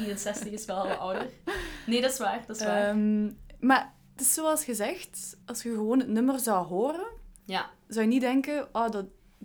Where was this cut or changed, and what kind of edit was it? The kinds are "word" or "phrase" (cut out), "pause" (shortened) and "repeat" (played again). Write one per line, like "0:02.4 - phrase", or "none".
0:05.4 - pause
0:07.4 - pause